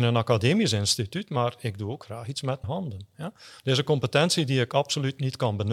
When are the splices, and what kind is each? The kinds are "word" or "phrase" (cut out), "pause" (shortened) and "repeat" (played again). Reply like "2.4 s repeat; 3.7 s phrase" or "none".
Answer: 2.6 s word